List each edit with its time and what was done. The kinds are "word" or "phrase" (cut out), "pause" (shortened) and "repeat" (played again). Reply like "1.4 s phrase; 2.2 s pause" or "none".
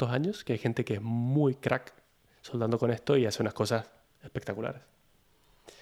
none